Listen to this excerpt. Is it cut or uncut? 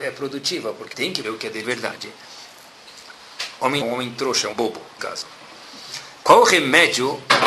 cut